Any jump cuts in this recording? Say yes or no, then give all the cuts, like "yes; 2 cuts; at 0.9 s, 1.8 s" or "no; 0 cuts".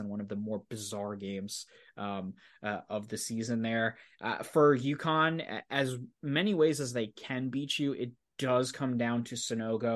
no; 0 cuts